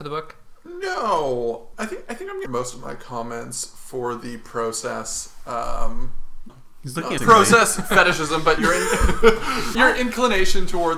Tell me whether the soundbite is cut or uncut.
cut